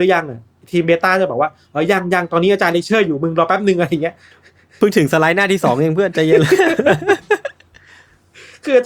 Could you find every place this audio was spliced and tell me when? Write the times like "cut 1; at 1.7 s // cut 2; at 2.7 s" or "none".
none